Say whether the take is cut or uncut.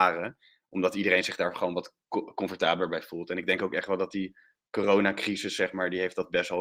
uncut